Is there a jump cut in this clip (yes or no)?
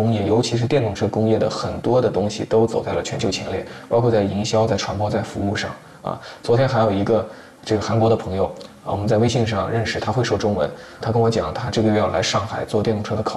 yes